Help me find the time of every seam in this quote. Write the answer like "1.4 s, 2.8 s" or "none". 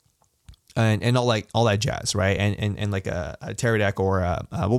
none